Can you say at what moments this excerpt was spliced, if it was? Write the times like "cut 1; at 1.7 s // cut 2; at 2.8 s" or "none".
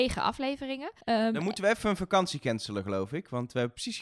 cut 1; at 1.0 s